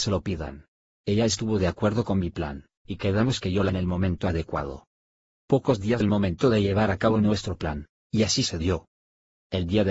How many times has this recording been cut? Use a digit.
3